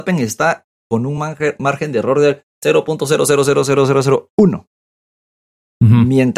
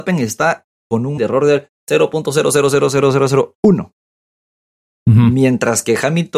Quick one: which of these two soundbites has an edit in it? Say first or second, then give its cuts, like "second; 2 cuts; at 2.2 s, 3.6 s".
second; 1 cut; at 1.2 s